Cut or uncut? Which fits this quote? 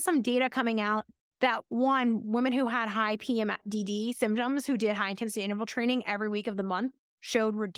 uncut